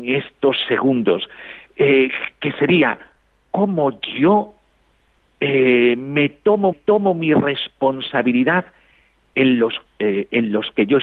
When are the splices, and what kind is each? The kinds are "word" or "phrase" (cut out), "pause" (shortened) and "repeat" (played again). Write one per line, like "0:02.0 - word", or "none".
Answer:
0:06.7 - repeat
0:09.8 - word